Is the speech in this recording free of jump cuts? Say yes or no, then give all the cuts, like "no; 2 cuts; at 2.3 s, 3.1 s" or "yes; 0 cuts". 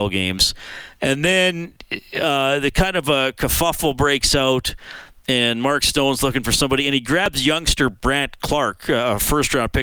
yes; 0 cuts